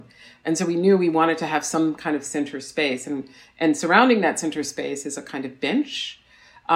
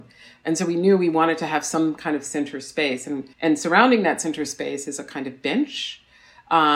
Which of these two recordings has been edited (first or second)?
second